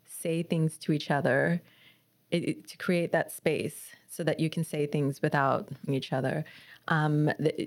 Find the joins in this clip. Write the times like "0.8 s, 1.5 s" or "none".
5.9 s